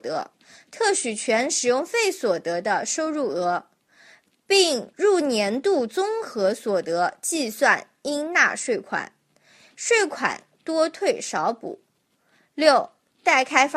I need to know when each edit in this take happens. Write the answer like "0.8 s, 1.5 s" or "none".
none